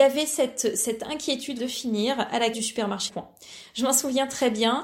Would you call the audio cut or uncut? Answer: cut